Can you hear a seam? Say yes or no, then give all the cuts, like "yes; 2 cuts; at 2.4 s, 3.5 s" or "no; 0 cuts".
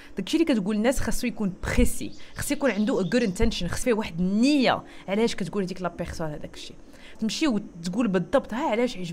yes; 2 cuts; at 3.8 s, 7.2 s